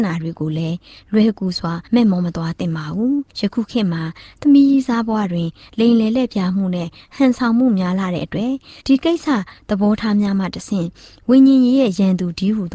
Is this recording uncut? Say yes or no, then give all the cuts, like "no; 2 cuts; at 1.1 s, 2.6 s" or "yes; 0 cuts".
no; 3 cuts; at 1.9 s, 3.3 s, 8.8 s